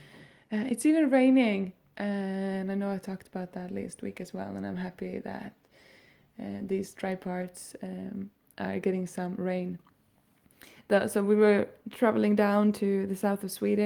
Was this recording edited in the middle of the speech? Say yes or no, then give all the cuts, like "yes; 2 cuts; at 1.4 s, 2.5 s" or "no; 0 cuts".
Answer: no; 0 cuts